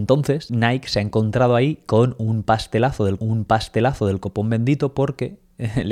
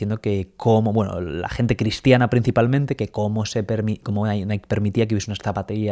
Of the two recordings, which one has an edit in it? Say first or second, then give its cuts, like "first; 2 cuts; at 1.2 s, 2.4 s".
first; 1 cut; at 3.2 s